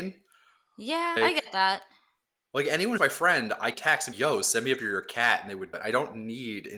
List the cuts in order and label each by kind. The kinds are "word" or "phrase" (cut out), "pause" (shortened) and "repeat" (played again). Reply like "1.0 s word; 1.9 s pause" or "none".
1.2 s word; 3.0 s word; 3.7 s word; 4.1 s word; 4.8 s word; 5.7 s word